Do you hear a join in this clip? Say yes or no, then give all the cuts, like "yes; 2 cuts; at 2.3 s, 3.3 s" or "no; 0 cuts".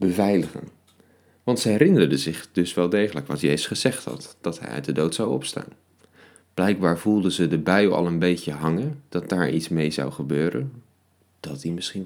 no; 0 cuts